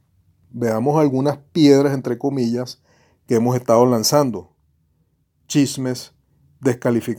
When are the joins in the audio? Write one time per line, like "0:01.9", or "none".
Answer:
none

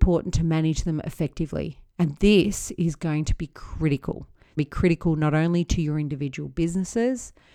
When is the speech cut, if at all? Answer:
0:04.6

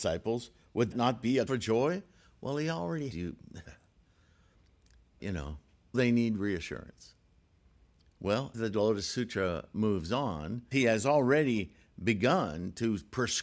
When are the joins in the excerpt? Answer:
0:00.9
0:01.5
0:03.1
0:05.2
0:05.9
0:08.5
0:10.7

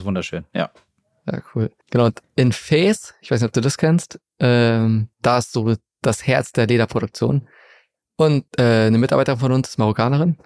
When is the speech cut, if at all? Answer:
0:01.8
0:05.1
0:08.5

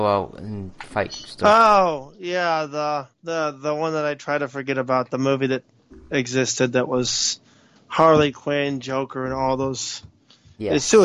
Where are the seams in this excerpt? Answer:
0:03.1

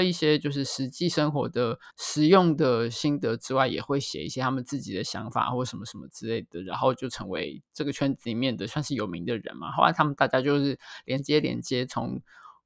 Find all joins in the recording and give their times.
0:01.9

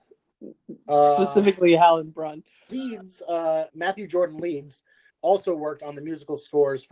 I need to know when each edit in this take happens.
0:02.7
0:03.7
0:05.1

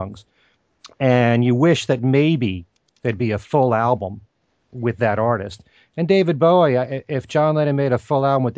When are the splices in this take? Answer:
none

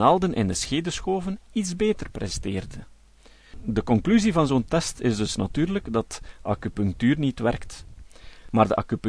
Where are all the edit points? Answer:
none

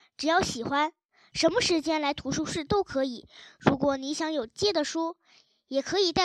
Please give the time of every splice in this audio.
none

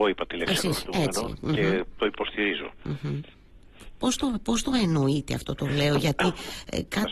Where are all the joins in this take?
none

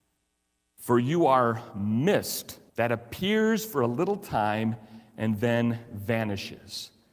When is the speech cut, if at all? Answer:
0:02.7

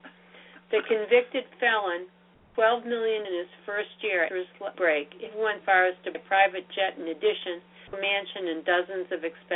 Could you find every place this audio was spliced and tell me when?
0:02.5
0:03.2
0:04.3
0:04.7
0:05.3
0:05.6
0:06.1
0:07.9

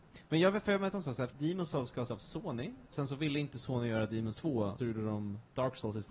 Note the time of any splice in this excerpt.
0:00.9
0:01.3
0:02.1
0:02.9
0:04.3
0:04.8

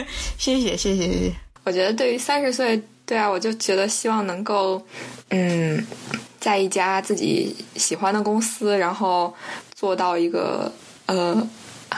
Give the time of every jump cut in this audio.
none

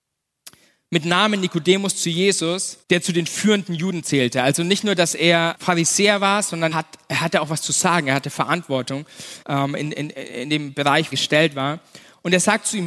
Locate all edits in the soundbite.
0:02.8
0:05.5
0:06.7
0:09.4
0:11.1

